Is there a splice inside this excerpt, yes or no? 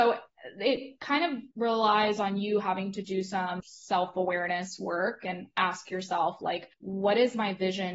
yes